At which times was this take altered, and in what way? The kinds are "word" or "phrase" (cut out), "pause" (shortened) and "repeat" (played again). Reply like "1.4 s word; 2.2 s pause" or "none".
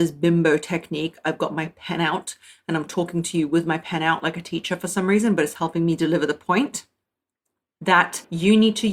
none